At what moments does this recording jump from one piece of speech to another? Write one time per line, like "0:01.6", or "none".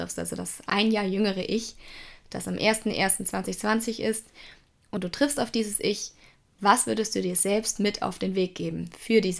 none